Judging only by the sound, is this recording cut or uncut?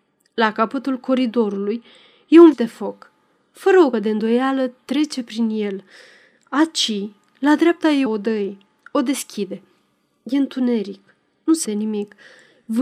cut